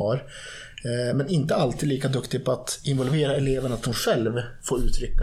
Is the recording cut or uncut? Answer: uncut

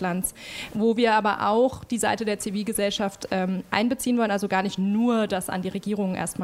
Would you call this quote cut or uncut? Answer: uncut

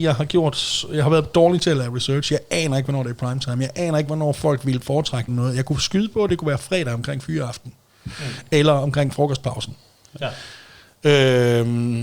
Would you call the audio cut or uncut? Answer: cut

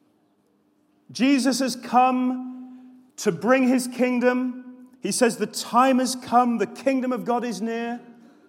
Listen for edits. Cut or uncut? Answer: cut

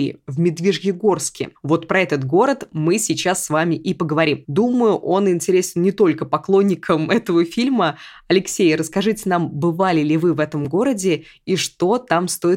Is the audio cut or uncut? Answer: uncut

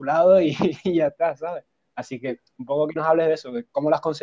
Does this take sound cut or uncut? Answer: uncut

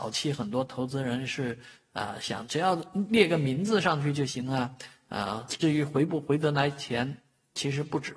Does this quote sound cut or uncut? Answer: uncut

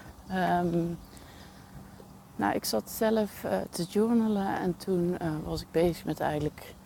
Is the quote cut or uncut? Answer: uncut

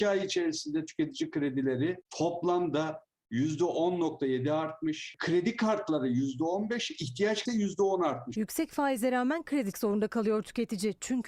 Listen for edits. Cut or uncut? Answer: cut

